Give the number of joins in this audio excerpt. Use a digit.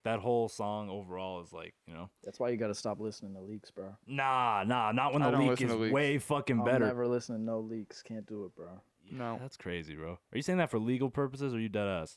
3